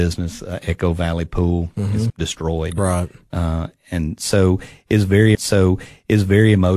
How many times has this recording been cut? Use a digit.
2